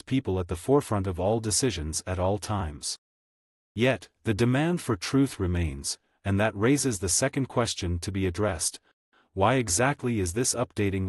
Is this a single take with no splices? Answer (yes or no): yes